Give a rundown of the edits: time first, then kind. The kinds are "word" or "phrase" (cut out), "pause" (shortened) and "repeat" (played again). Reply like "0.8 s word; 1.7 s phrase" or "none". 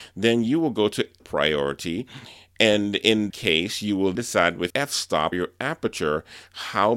1.2 s word; 3.3 s word; 4.1 s word; 4.7 s word; 5.3 s word